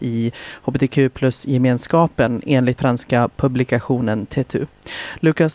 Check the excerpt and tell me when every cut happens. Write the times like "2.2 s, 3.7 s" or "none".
2.8 s